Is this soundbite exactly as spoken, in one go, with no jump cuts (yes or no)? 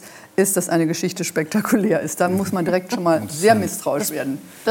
yes